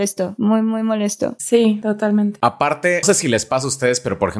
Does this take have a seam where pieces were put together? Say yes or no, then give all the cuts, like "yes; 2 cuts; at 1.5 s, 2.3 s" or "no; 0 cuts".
yes; 1 cut; at 3.0 s